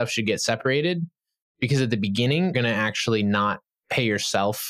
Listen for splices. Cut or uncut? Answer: cut